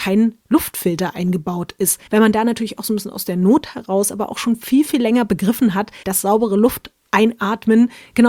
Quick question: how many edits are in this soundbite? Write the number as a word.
two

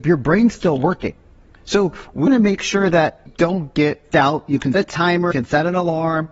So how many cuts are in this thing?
five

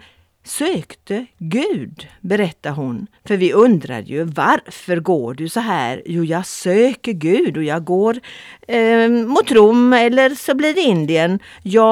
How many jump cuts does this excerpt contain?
one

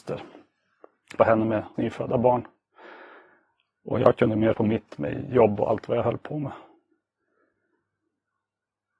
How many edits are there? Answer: three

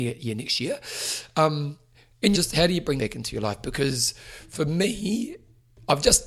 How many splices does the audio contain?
two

